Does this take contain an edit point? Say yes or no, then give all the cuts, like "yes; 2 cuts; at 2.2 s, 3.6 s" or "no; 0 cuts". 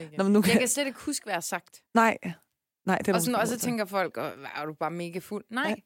no; 0 cuts